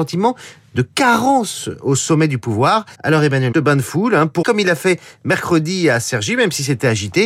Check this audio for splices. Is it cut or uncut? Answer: cut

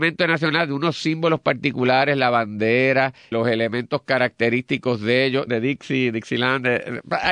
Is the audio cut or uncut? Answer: cut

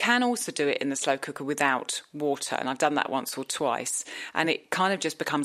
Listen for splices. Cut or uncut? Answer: uncut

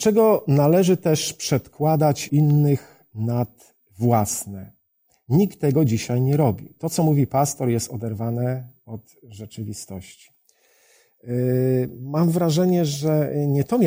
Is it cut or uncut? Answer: cut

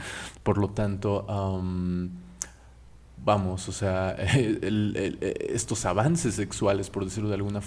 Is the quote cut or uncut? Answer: uncut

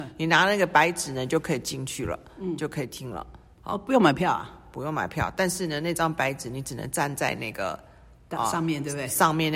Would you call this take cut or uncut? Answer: uncut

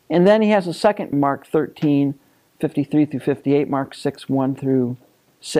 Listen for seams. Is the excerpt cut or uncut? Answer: cut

